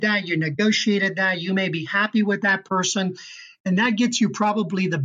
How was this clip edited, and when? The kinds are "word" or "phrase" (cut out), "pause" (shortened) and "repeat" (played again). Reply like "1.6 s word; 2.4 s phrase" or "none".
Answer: none